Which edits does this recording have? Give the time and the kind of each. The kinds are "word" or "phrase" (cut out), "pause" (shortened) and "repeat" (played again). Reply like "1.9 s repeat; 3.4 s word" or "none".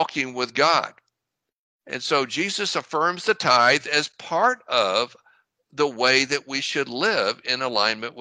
none